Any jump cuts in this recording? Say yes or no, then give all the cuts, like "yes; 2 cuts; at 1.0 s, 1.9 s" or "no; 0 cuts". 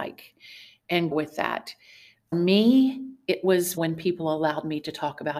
yes; 3 cuts; at 1.1 s, 2.3 s, 3.8 s